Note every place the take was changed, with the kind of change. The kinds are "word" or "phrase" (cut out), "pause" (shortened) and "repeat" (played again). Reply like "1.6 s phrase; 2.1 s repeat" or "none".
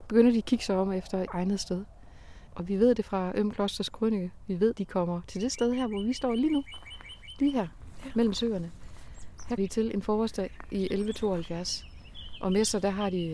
1.3 s word; 4.7 s word; 9.6 s word

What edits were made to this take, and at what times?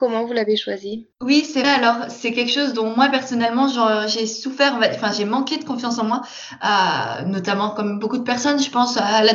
1.1 s pause; 1.6 s word

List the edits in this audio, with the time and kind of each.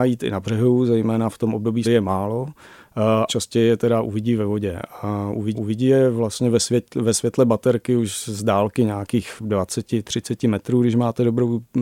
1.8 s phrase; 3.3 s word; 5.5 s repeat

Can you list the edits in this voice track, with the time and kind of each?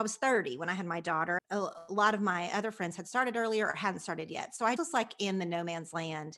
1.4 s word; 4.8 s word

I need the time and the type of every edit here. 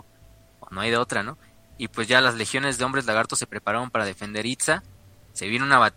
none

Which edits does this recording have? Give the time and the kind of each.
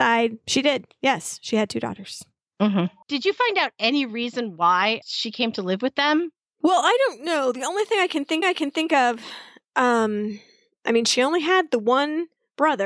8.4 s repeat

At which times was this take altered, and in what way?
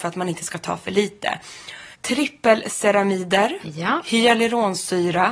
1.9 s pause

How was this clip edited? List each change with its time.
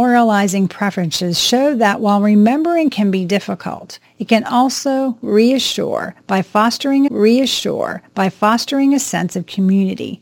7.1 s repeat

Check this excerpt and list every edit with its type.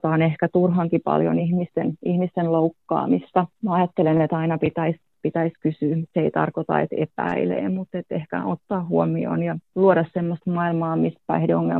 none

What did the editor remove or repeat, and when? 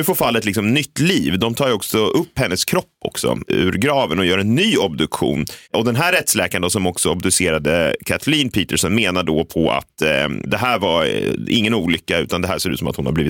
5.6 s pause

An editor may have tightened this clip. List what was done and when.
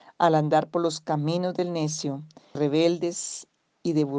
2.5 s word

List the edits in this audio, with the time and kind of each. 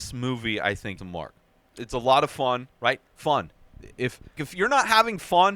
1.0 s word; 2.7 s pause; 4.4 s word

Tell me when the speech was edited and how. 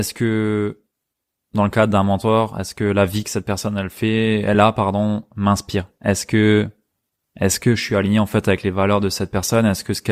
none

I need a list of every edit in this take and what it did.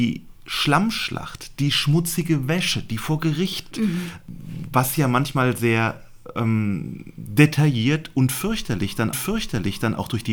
3.7 s phrase; 9.1 s repeat

